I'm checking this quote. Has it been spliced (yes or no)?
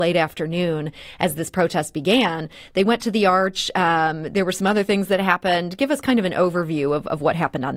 no